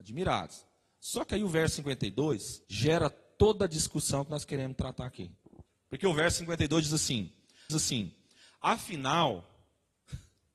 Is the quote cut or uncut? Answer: cut